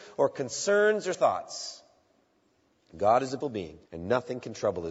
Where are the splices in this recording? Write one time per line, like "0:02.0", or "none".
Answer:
0:01.1
0:03.4
0:03.9